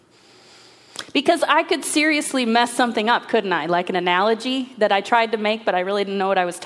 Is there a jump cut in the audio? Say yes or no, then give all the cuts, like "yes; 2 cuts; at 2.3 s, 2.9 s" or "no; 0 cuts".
no; 0 cuts